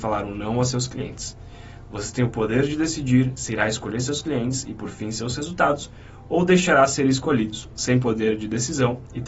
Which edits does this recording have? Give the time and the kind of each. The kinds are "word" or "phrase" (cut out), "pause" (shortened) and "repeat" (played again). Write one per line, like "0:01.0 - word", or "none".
none

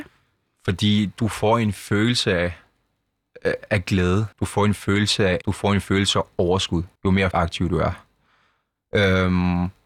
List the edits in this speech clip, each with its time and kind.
0:04.3 - pause
0:05.4 - word
0:07.0 - pause
0:07.3 - word

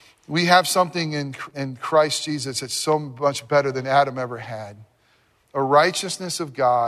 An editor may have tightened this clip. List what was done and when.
0:01.5 - word

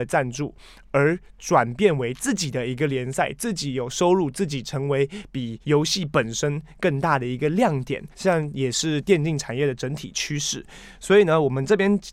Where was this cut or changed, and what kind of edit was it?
0:05.6 - pause
0:08.1 - pause

